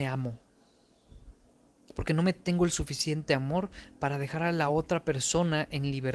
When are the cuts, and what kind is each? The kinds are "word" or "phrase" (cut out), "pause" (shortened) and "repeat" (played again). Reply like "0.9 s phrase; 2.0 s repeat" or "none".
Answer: none